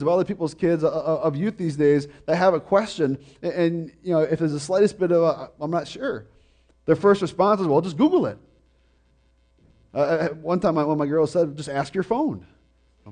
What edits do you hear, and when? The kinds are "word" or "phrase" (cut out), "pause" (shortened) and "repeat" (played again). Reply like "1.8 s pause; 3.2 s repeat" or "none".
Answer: none

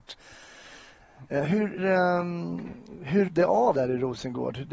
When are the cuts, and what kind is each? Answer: 1.8 s word; 3.3 s word; 3.7 s word

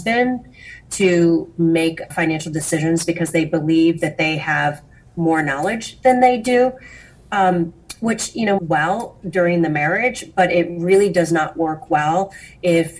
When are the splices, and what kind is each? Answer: 2.1 s word; 8.6 s phrase

